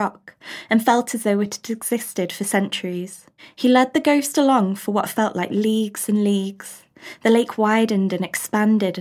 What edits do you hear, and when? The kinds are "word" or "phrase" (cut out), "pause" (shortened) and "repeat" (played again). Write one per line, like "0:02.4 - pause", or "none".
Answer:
0:03.4 - pause